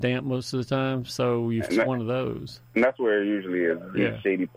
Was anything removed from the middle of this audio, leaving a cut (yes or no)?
yes